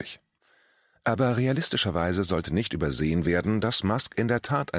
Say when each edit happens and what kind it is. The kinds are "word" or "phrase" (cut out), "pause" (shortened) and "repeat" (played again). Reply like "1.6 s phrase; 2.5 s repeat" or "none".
none